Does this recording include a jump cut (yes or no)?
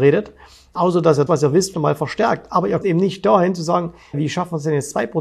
yes